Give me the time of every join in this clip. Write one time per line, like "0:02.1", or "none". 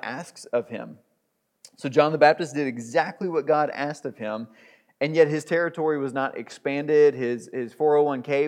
none